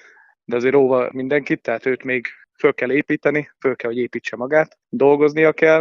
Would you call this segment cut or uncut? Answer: cut